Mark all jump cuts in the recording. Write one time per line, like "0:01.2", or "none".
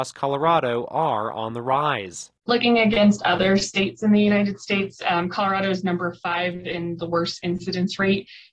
none